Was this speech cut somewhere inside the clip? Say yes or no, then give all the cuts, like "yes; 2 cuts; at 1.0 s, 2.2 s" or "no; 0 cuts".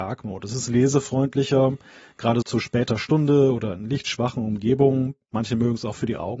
yes; 1 cut; at 2.4 s